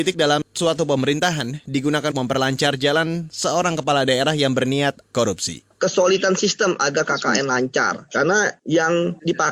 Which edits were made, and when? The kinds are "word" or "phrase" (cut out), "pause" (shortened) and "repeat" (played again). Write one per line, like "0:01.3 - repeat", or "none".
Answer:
0:02.1 - word
0:05.0 - word
0:05.7 - pause